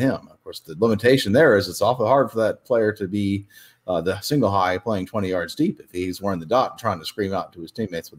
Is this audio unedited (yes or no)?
yes